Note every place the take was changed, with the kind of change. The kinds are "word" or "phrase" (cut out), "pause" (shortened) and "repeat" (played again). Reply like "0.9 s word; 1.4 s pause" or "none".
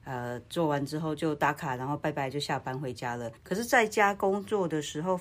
3.4 s pause